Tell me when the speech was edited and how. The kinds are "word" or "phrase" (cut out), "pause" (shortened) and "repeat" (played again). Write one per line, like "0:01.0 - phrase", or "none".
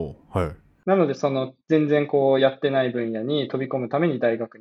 0:01.6 - pause